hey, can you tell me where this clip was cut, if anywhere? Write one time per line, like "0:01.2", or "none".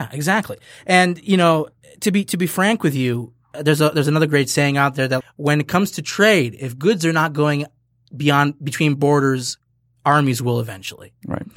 0:05.2